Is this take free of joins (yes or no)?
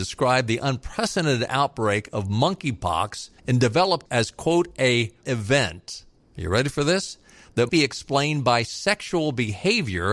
no